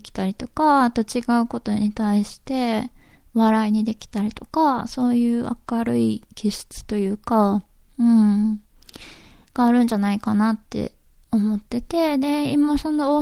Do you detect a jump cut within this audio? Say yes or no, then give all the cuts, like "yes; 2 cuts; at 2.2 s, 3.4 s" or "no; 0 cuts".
no; 0 cuts